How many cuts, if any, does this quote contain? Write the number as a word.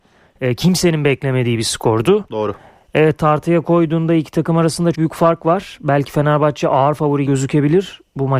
two